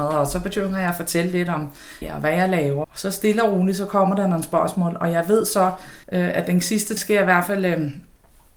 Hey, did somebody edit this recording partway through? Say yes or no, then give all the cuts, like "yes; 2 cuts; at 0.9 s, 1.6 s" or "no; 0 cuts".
yes; 4 cuts; at 2.0 s, 2.8 s, 6.0 s, 7.0 s